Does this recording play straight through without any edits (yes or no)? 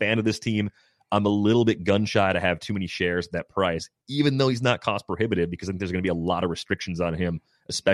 yes